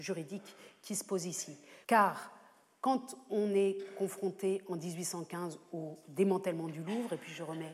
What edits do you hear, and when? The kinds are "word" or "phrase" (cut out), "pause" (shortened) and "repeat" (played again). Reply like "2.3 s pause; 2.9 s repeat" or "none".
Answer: 1.8 s pause